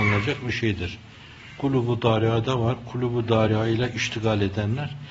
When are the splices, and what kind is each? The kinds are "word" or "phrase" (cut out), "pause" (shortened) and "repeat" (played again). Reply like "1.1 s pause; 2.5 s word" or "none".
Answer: none